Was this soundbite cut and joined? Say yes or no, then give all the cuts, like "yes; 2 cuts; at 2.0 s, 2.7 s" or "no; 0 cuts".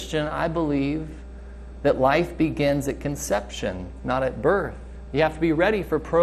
no; 0 cuts